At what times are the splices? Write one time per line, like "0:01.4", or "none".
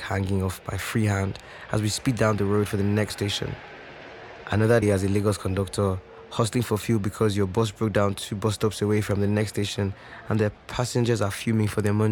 0:03.1
0:04.8